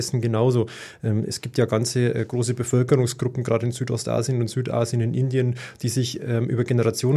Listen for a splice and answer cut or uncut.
uncut